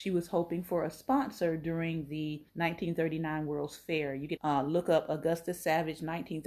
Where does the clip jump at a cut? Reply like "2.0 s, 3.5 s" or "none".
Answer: 2.5 s, 4.4 s